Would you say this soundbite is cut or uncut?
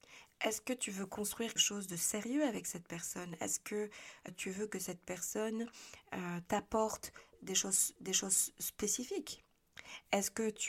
cut